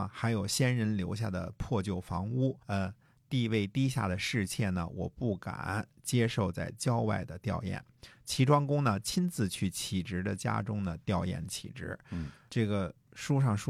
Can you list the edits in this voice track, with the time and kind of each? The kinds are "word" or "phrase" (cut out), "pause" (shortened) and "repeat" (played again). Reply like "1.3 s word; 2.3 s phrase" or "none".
2.6 s pause; 12.5 s word